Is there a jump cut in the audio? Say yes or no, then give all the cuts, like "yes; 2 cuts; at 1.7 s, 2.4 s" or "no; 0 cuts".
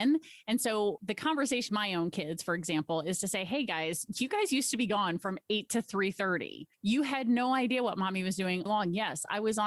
yes; 2 cuts; at 1.7 s, 8.7 s